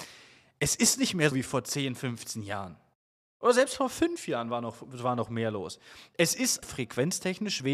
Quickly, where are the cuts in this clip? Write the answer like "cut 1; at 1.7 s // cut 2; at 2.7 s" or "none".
cut 1; at 1.3 s // cut 2; at 6.6 s